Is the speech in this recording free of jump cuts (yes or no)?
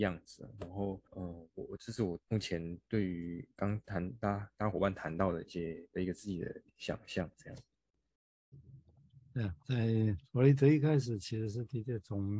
no